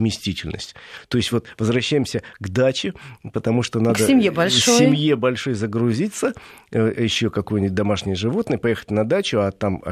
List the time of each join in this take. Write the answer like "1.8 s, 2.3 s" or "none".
none